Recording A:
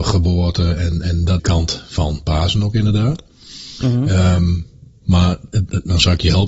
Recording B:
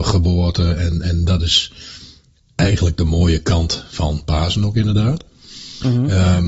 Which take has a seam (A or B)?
A